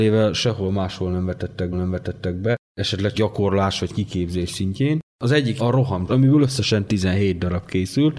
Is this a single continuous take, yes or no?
no